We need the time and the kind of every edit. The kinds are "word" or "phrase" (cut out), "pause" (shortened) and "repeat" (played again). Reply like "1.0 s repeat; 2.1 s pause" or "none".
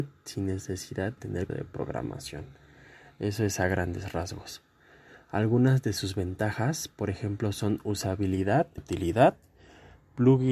1.2 s word; 1.5 s word; 8.8 s word